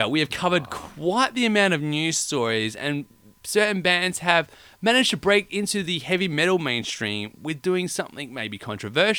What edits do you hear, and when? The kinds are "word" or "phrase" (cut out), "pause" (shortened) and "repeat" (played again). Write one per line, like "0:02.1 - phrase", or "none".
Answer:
none

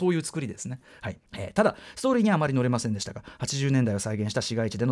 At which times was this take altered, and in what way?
0:01.3 - pause

